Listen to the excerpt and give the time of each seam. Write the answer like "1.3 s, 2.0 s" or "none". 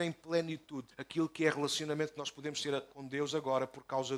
0.9 s